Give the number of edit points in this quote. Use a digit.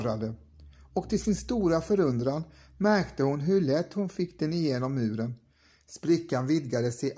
0